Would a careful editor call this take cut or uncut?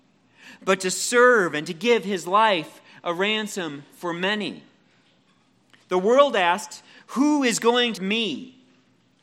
cut